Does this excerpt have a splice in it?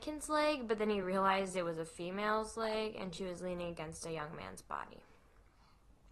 no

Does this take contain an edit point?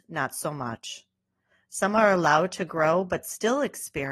no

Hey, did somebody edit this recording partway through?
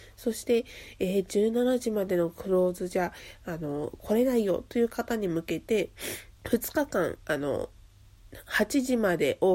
yes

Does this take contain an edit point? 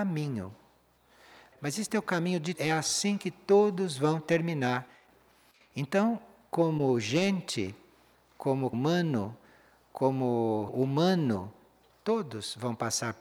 yes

